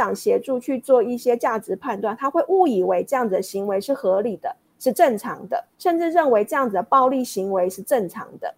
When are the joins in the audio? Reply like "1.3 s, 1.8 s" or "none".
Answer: 5.7 s